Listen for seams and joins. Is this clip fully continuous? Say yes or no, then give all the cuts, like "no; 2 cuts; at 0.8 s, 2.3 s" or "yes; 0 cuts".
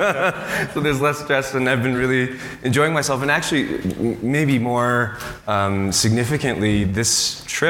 yes; 0 cuts